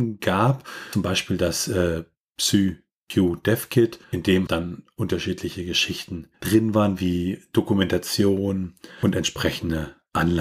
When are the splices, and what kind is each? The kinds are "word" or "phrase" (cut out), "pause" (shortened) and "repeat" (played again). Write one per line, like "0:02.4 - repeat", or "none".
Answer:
0:04.0 - pause
0:04.5 - word
0:06.3 - pause

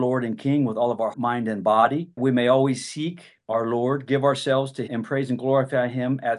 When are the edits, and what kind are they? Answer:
0:01.1 - word
0:02.2 - word
0:04.9 - word

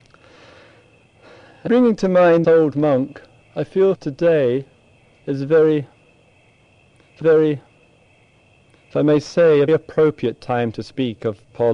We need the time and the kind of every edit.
0:01.7 - word
0:02.4 - word
0:04.0 - word
0:07.2 - repeat
0:09.7 - word

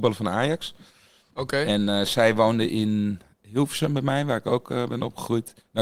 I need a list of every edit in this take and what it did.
none

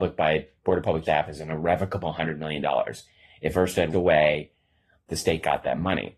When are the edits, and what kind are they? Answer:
0:01.0 - word
0:03.9 - word

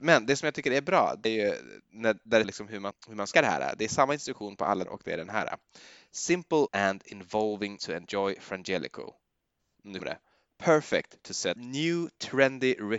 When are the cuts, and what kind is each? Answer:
0:01.2 - word
0:02.4 - word
0:02.9 - word
0:03.3 - word
0:04.8 - word
0:06.7 - word
0:07.8 - word
0:10.0 - word
0:11.6 - word

